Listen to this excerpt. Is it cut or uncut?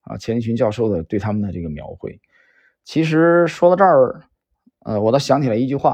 uncut